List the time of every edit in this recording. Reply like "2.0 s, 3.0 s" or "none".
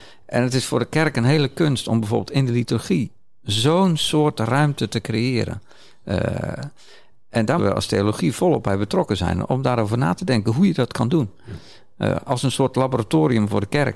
7.6 s